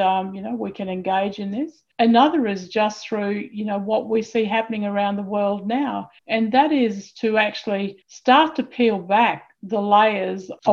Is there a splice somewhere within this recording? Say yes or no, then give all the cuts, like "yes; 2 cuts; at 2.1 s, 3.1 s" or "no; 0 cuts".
yes; 2 cuts; at 6.2 s, 8.0 s